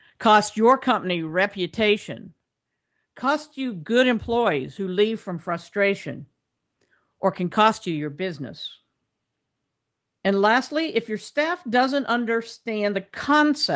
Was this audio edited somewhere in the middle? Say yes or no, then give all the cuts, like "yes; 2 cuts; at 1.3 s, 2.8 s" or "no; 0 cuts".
no; 0 cuts